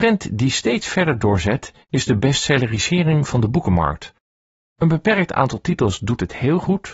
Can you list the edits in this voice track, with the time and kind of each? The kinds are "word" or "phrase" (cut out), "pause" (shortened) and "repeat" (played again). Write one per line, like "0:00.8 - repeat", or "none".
none